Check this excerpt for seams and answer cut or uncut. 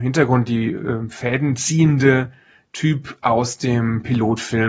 uncut